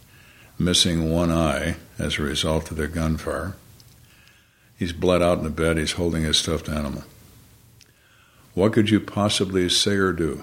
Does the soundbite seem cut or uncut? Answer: uncut